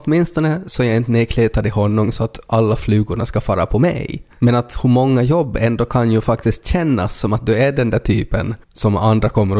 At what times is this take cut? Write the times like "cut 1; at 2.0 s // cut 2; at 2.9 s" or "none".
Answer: cut 1; at 4.3 s // cut 2; at 8.6 s